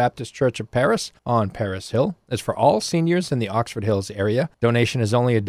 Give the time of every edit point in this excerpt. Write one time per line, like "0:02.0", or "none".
0:01.2
0:04.5